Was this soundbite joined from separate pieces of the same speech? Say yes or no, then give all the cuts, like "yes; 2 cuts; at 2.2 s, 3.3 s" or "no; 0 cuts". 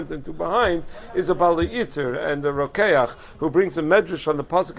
no; 0 cuts